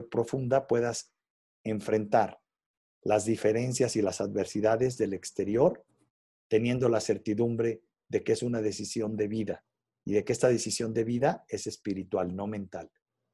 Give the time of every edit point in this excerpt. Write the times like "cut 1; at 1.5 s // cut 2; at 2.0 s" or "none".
none